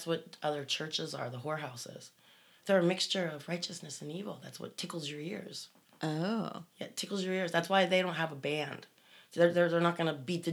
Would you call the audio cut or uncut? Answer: uncut